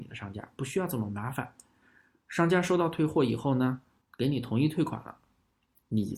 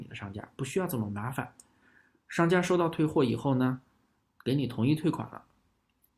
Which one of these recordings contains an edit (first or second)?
first